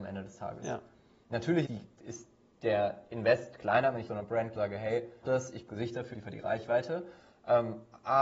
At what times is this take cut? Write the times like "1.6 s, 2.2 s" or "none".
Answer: 1.7 s, 4.1 s, 4.6 s, 5.2 s, 5.7 s, 6.1 s